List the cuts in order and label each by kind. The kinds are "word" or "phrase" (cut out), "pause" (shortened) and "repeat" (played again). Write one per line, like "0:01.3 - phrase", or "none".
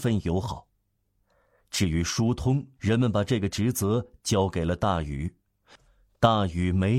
0:02.8 - pause